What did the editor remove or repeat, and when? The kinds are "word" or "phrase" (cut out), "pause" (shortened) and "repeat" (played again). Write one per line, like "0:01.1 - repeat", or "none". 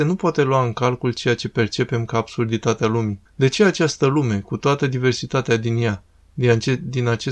0:03.3 - pause

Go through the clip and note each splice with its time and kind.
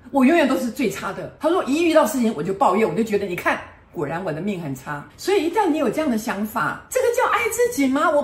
0:05.1 - pause

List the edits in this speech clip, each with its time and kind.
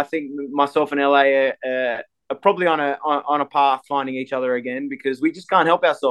none

